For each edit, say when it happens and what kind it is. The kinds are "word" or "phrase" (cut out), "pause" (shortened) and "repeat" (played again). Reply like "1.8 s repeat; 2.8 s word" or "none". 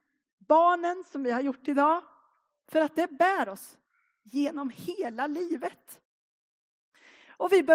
none

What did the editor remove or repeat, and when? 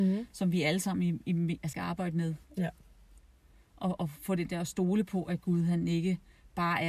1.7 s word

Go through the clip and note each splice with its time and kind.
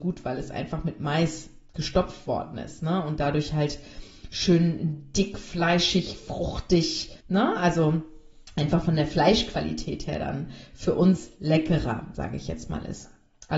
7.2 s pause

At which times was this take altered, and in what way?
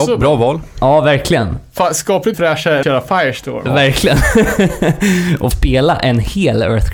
2.3 s word; 2.8 s word; 5.5 s word

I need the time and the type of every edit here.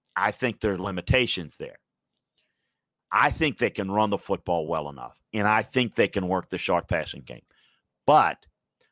none

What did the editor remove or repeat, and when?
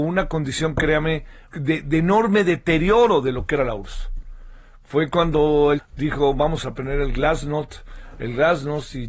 1.5 s word; 5.8 s phrase

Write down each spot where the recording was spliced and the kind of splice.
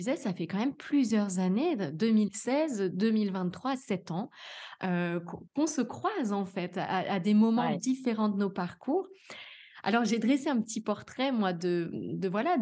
5.5 s pause

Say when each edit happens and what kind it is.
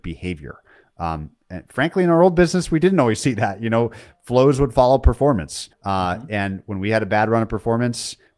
1.4 s pause; 5.7 s pause

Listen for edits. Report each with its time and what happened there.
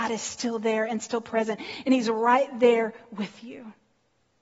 none

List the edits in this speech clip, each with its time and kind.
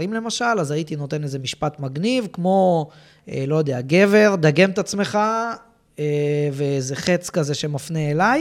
none

